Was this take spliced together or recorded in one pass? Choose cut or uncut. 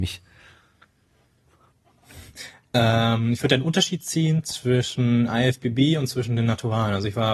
uncut